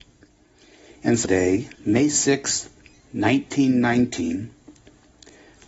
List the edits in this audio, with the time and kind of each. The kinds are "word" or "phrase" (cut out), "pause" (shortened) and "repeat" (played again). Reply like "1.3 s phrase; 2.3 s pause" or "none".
1.2 s phrase; 1.8 s pause

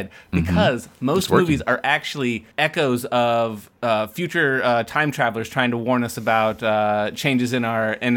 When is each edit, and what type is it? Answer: 2.5 s pause

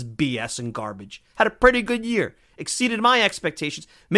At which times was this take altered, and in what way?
none

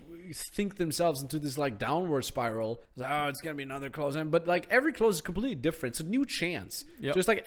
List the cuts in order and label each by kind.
2.8 s pause

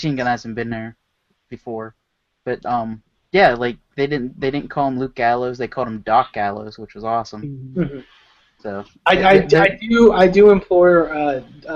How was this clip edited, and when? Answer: 2.1 s pause

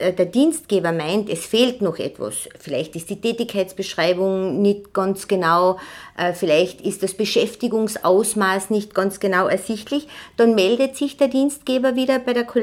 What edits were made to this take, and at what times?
none

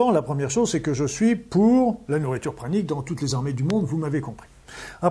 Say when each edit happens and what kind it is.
none

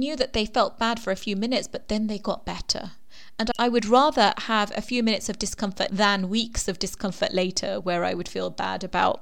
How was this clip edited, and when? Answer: 5.9 s word

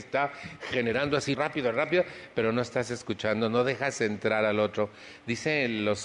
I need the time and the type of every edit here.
1.3 s word

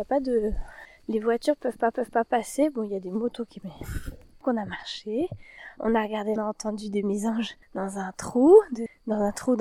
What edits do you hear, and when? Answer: 1.9 s repeat; 3.6 s word; 4.4 s word; 6.4 s phrase; 7.0 s word; 7.6 s pause

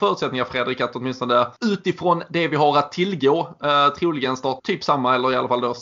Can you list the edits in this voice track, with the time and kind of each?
1.6 s pause; 4.6 s word

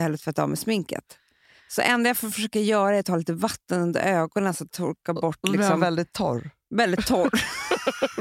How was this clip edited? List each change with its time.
none

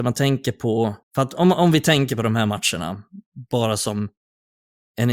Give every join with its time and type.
1.0 s pause

